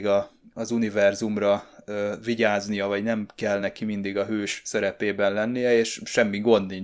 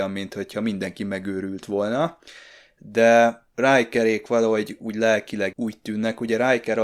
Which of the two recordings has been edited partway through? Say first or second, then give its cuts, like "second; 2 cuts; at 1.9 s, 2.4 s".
second; 1 cut; at 5.5 s